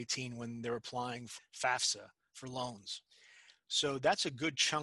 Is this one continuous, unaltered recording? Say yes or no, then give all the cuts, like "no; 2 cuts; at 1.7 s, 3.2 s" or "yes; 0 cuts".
no; 1 cut; at 1.4 s